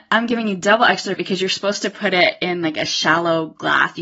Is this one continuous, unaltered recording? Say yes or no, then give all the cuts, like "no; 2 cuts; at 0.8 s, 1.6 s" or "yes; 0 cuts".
no; 1 cut; at 1.2 s